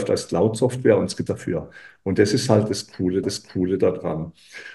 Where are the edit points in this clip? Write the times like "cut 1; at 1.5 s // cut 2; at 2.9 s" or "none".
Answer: cut 1; at 1.3 s // cut 2; at 3.2 s